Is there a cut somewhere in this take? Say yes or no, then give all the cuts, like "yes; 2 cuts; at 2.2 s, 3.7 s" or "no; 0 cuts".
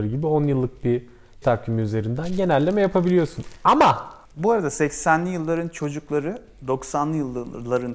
yes; 2 cuts; at 1.4 s, 4.2 s